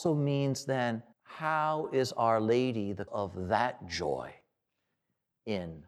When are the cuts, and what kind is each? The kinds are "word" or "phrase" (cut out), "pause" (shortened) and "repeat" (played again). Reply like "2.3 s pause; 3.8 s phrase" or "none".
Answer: 1.1 s pause; 3.1 s word